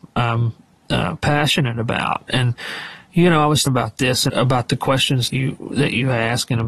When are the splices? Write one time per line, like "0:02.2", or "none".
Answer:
0:03.7
0:04.3
0:05.3

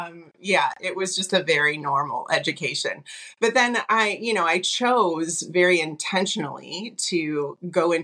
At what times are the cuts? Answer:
none

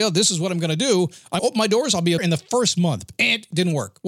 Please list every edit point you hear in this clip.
0:01.4
0:02.2

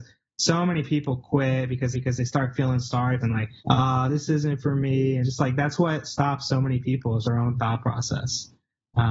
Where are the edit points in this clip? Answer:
0:01.9
0:03.2
0:03.6
0:05.2
0:07.2

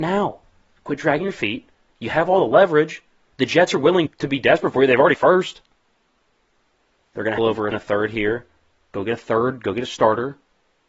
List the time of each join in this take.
0:04.1
0:05.1
0:07.4
0:07.7

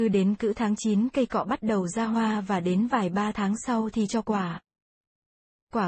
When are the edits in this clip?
none

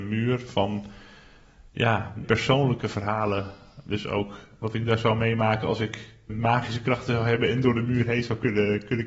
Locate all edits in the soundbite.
0:02.2
0:04.6
0:06.3

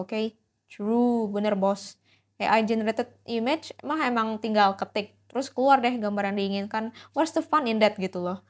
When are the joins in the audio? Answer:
none

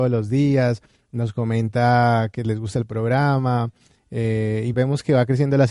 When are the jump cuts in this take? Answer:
0:04.7

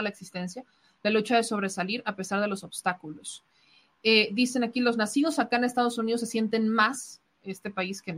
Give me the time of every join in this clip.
none

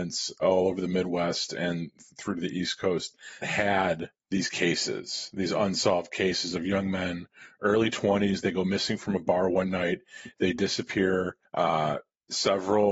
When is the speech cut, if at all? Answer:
0:03.4
0:04.2
0:11.5

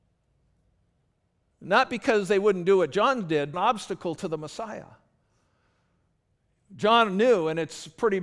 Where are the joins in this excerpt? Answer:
0:03.5

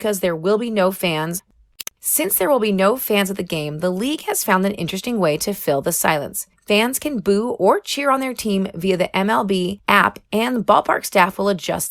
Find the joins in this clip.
0:01.9

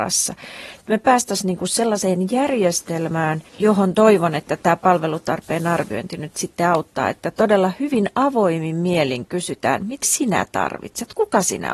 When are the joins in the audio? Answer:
0:03.5
0:10.0

